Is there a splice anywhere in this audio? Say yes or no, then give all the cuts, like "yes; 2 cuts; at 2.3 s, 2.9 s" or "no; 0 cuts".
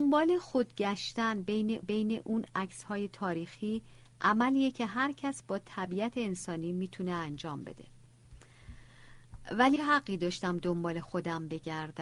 yes; 2 cuts; at 1.8 s, 9.8 s